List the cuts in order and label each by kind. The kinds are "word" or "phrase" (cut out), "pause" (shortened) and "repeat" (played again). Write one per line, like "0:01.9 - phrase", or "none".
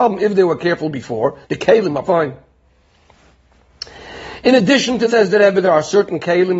0:01.4 - pause
0:02.0 - word
0:05.1 - word